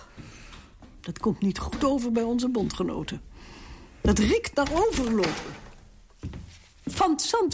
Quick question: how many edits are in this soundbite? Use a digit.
0